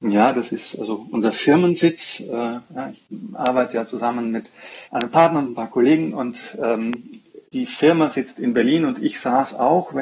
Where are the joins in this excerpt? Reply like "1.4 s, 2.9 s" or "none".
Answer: 4.8 s, 7.4 s